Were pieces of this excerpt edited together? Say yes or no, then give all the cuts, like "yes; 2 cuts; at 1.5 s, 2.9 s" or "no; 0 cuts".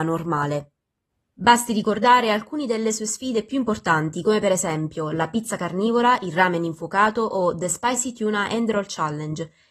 yes; 1 cut; at 1.1 s